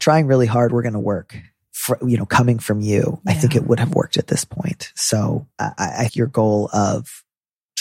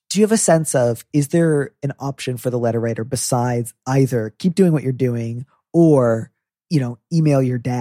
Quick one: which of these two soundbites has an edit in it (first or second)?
first